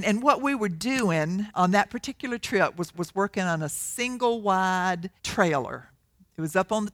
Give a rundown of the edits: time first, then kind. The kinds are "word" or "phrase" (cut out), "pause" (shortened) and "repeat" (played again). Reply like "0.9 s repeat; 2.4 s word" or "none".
1.5 s word; 2.9 s repeat; 5.2 s pause